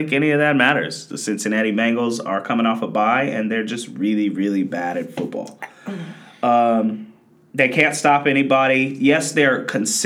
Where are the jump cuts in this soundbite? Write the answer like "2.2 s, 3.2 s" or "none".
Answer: none